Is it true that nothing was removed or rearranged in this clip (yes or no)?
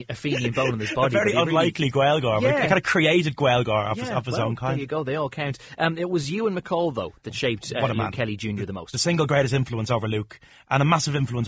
yes